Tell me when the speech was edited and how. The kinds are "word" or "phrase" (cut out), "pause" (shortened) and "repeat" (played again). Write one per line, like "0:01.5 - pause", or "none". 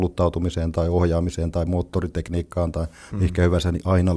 none